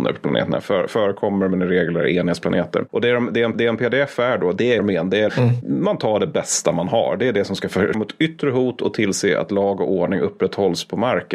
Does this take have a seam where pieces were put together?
yes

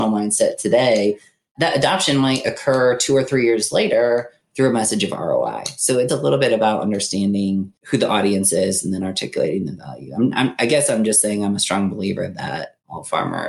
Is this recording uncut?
no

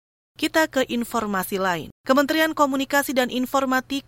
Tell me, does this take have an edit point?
yes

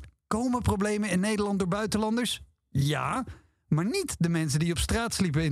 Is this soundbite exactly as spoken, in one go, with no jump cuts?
yes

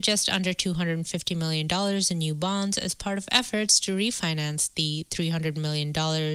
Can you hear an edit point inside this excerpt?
no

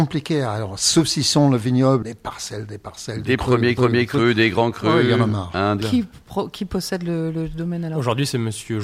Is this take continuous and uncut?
no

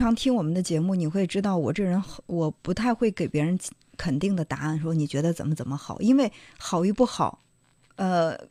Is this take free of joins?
yes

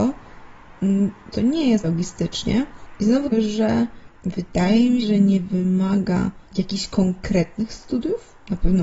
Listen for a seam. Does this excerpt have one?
yes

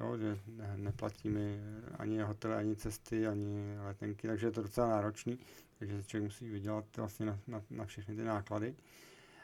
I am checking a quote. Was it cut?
no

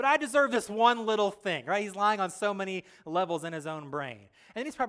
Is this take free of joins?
yes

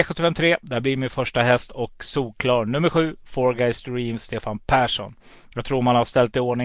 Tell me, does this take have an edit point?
no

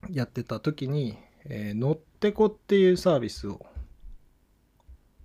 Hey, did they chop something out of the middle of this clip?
no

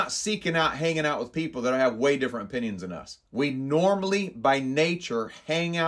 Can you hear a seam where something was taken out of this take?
yes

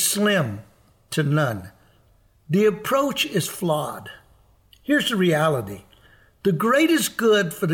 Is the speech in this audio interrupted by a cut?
no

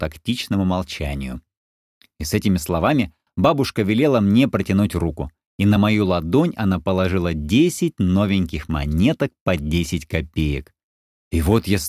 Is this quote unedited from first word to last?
yes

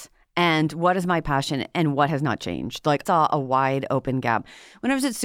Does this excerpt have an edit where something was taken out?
yes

